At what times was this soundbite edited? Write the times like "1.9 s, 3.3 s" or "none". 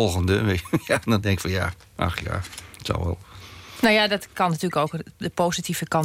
none